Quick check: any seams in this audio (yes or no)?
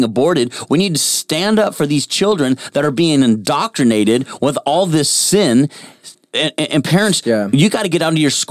no